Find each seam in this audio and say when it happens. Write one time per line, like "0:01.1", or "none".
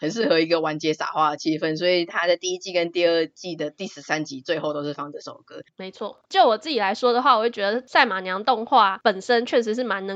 none